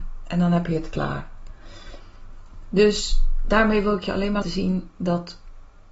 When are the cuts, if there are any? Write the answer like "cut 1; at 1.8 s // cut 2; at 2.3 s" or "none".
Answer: cut 1; at 4.4 s